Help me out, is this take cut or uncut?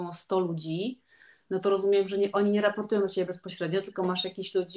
uncut